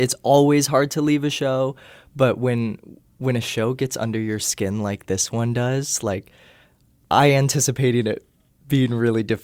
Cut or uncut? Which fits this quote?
uncut